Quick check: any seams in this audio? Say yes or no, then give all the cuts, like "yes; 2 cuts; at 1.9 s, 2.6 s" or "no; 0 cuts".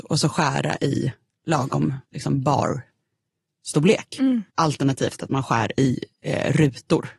yes; 2 cuts; at 2.0 s, 4.5 s